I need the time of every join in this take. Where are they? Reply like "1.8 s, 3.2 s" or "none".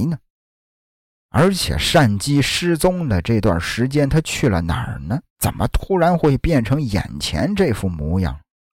5.3 s

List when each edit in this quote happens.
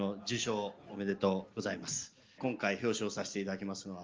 1.5 s, 2.4 s

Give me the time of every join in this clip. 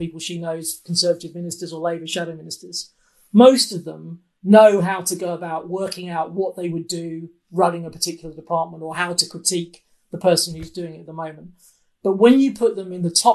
none

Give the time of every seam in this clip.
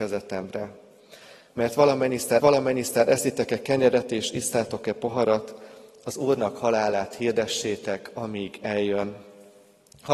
2.4 s

